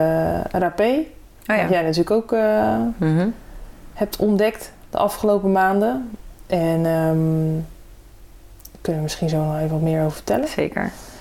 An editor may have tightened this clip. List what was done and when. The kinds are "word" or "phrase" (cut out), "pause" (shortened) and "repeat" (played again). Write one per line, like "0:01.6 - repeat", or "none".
none